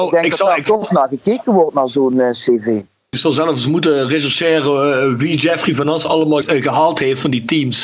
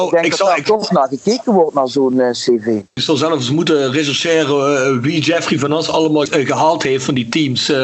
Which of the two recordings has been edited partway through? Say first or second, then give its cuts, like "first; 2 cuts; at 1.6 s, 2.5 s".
second; 1 cut; at 2.9 s